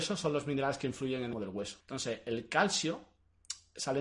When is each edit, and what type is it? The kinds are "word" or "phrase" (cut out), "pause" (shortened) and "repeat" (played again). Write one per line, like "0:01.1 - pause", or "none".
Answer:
0:01.3 - phrase
0:01.8 - pause